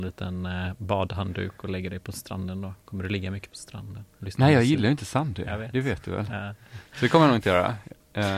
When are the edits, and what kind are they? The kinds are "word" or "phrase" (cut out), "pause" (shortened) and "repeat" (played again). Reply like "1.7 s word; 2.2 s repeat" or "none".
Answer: none

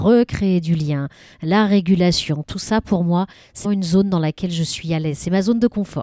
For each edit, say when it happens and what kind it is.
3.6 s word

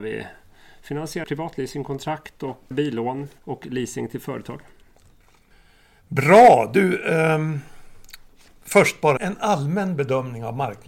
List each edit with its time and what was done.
1.2 s word; 2.7 s word; 3.4 s pause; 9.2 s word

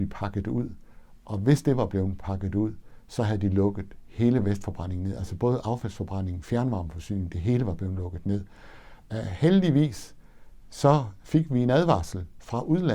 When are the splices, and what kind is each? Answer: none

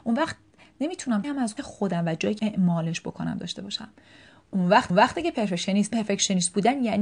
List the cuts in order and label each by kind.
1.2 s phrase; 1.6 s word; 2.4 s word; 4.9 s repeat; 5.9 s phrase

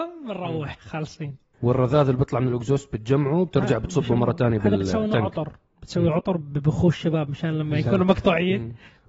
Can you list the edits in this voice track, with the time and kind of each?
1.5 s pause

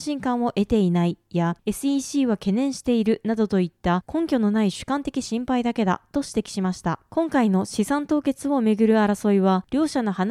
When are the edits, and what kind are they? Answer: none

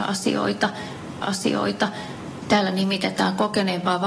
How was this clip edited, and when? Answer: 1.2 s repeat

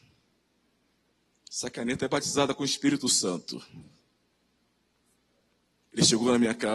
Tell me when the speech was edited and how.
none

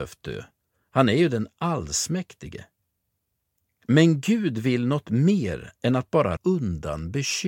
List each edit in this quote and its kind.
6.4 s word

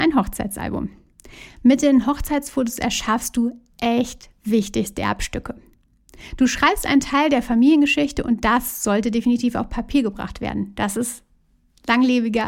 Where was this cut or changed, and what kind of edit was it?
none

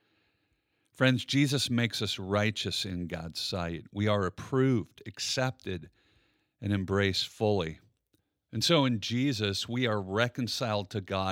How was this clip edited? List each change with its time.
none

